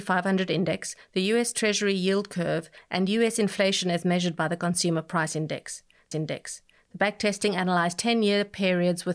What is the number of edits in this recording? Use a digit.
1